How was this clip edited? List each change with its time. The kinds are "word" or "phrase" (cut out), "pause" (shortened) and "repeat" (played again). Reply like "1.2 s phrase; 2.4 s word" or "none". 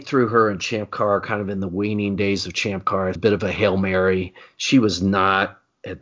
3.2 s phrase